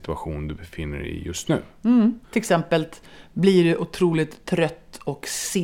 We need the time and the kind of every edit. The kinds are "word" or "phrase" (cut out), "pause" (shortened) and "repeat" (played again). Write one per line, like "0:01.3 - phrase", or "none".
0:02.2 - pause